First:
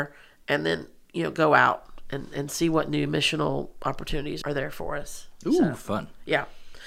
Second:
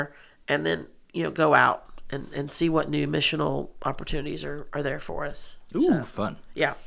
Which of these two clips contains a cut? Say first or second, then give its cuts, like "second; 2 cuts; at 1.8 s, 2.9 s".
first; 1 cut; at 4.4 s